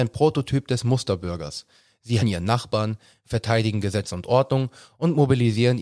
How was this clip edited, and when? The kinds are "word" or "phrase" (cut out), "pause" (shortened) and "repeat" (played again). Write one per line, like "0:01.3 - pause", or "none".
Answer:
0:02.2 - word